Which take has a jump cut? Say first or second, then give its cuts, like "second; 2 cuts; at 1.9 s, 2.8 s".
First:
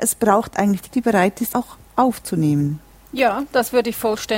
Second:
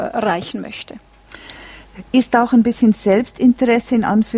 first; 3 cuts; at 0.9 s, 1.5 s, 2.9 s